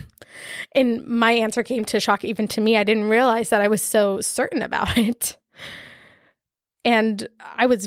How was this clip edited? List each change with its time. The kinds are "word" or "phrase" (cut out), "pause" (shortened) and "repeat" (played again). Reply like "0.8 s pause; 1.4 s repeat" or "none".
none